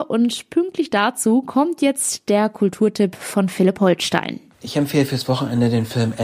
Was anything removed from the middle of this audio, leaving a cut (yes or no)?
no